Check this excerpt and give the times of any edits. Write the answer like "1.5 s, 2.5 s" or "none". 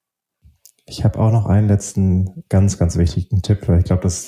none